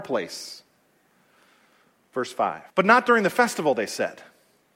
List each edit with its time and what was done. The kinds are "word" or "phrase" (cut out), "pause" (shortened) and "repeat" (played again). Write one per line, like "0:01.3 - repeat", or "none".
0:02.7 - pause